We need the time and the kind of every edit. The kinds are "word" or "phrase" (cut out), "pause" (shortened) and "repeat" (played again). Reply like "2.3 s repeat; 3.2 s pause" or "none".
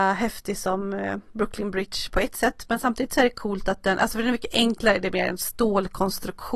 none